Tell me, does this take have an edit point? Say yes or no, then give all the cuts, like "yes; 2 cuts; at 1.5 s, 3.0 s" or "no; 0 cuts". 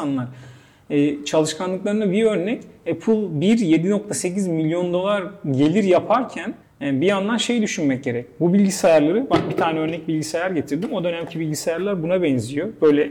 yes; 1 cut; at 6.6 s